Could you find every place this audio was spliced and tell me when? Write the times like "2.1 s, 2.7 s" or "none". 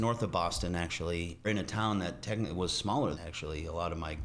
1.4 s, 3.1 s